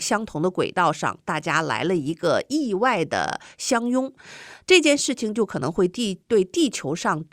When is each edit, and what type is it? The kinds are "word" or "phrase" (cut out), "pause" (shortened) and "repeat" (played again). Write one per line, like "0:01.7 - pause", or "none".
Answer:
0:06.2 - pause